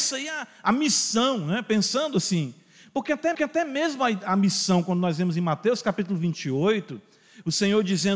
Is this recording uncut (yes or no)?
no